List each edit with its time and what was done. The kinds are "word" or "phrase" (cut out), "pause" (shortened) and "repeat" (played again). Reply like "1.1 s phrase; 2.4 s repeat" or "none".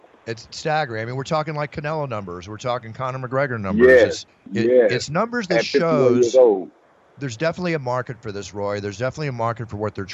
4.3 s pause; 6.8 s pause